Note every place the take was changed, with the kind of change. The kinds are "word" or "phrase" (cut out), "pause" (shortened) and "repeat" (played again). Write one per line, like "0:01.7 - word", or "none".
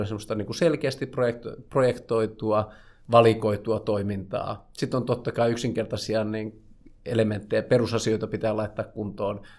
none